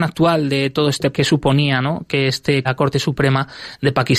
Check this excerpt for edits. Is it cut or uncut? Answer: cut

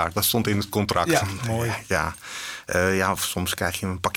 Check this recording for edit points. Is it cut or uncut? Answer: uncut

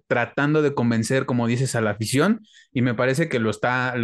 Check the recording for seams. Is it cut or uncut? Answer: uncut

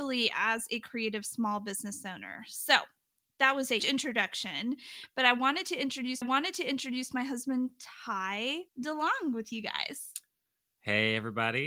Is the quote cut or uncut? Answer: cut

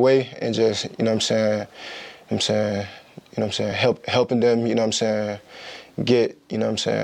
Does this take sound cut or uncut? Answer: uncut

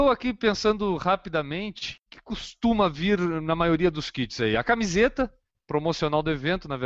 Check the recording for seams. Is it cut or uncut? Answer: cut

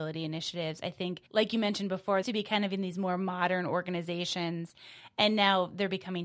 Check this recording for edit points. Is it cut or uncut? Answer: cut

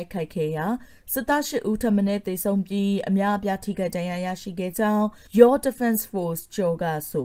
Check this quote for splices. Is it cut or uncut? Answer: cut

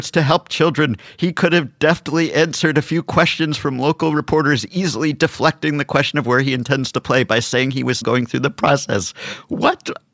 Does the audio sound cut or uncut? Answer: cut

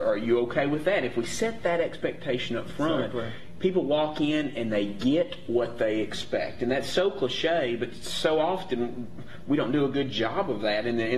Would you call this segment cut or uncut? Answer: uncut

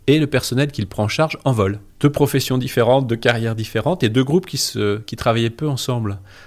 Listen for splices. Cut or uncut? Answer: cut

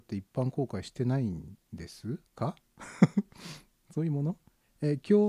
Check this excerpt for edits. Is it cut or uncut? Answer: cut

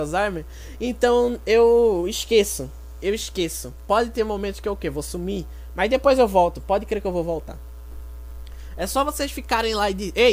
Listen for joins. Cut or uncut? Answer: uncut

